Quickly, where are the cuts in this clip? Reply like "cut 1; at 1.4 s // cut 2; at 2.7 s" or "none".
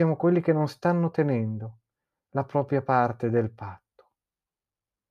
none